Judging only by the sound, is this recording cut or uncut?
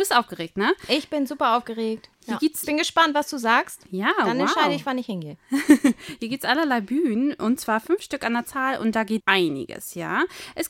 cut